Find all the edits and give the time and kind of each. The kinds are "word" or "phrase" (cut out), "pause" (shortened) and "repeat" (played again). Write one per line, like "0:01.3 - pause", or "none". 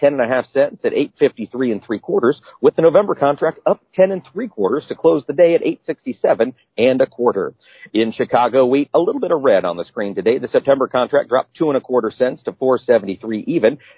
none